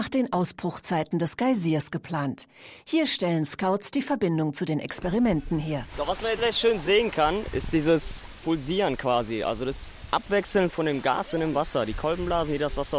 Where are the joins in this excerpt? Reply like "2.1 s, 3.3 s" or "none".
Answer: 6.4 s